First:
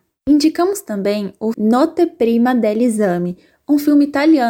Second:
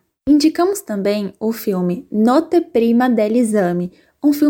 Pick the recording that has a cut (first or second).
first